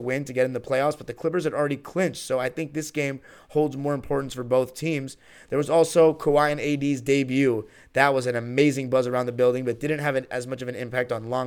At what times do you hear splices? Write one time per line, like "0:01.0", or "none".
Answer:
none